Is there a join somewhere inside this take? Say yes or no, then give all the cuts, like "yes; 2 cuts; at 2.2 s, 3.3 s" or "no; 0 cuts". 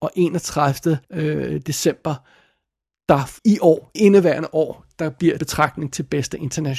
yes; 4 cuts; at 1.0 s, 3.4 s, 4.0 s, 5.4 s